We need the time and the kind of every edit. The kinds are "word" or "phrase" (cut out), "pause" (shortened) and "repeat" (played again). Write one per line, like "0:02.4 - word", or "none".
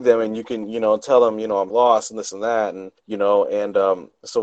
0:01.7 - phrase
0:03.0 - pause